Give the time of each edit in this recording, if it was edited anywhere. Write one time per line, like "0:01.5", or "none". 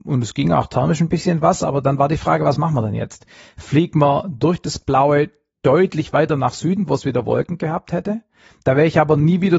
none